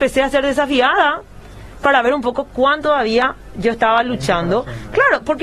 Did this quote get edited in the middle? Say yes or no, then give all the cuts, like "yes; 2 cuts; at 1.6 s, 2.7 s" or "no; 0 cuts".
yes; 1 cut; at 2.8 s